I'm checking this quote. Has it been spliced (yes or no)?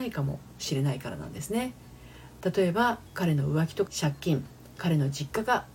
yes